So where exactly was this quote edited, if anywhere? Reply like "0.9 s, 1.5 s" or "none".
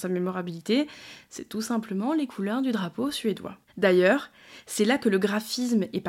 3.7 s